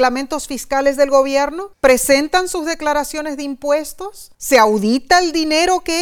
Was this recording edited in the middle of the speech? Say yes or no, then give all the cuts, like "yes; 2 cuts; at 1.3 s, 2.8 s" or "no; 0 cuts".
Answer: yes; 2 cuts; at 1.7 s, 4.3 s